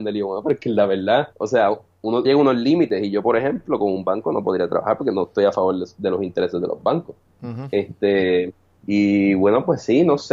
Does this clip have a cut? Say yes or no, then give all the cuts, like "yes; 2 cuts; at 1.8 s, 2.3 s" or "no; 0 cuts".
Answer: yes; 3 cuts; at 1.3 s, 2.2 s, 8.7 s